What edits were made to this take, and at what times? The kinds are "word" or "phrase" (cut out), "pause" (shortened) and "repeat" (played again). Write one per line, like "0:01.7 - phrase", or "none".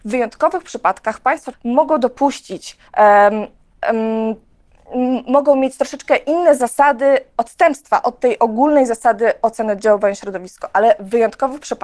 0:01.5 - word
0:02.9 - pause